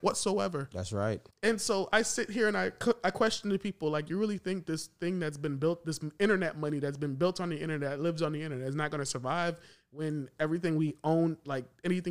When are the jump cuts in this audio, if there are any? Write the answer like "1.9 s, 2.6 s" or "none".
1.3 s